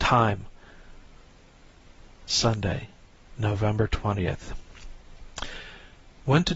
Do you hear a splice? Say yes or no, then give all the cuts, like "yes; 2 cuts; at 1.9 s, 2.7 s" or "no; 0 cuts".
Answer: no; 0 cuts